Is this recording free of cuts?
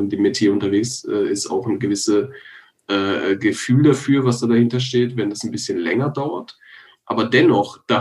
yes; 0 cuts

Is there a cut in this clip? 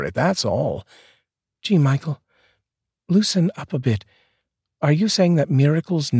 no; 0 cuts

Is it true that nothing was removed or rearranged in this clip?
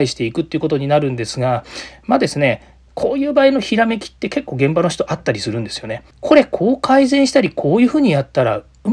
no; 1 cut; at 6.1 s

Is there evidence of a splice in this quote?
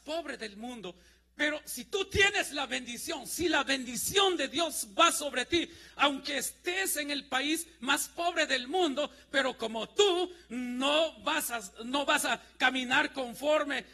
no; 0 cuts

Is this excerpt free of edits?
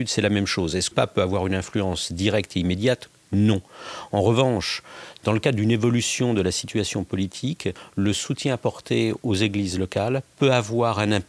no; 1 cut; at 0.9 s

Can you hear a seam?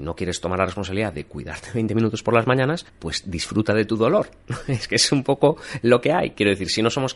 yes; 1 cut; at 2.9 s

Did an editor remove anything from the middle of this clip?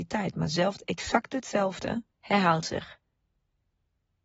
yes; 1 cut; at 2.1 s

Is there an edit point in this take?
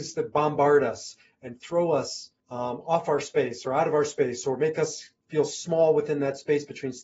yes; 1 cut; at 2.4 s

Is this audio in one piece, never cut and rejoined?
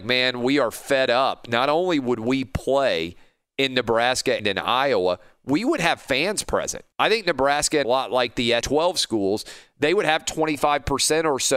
no; 4 cuts; at 4.4 s, 6.9 s, 7.8 s, 8.6 s

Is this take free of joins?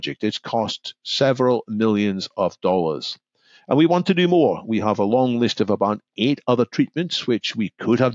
yes; 0 cuts

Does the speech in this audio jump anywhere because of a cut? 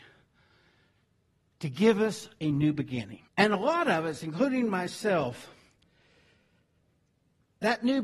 yes; 1 cut; at 3.3 s

